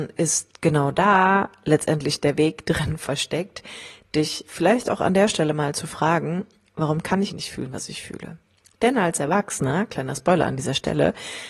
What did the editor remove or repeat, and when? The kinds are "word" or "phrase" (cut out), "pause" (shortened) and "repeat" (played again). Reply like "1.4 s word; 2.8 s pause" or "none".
7.3 s word